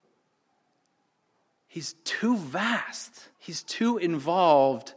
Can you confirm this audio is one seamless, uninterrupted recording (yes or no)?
no